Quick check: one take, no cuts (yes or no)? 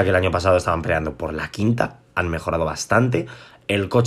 yes